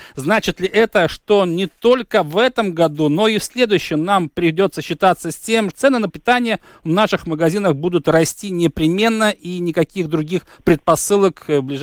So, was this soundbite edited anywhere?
yes; 2 cuts; at 5.7 s, 6.1 s

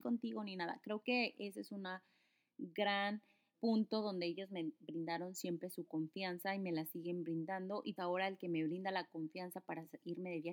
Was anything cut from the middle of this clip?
yes; 2 cuts; at 3.5 s, 8.0 s

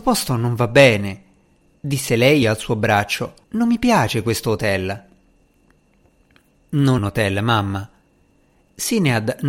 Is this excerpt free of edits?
no; 3 cuts; at 2.4 s, 3.4 s, 7.0 s

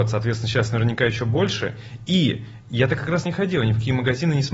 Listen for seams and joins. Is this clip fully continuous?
no; 1 cut; at 3.3 s

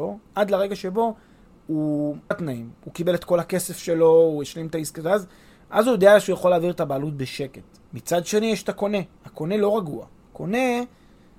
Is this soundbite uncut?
no; 2 cuts; at 2.3 s, 7.9 s

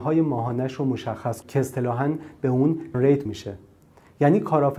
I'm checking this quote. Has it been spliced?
yes; 3 cuts; at 1.4 s, 2.9 s, 3.3 s

